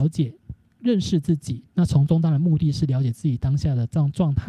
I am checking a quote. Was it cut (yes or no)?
yes